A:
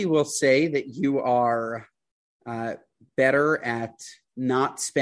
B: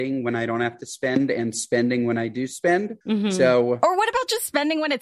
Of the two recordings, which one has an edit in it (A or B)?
B